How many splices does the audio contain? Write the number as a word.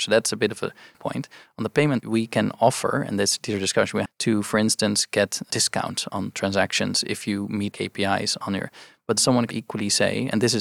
eight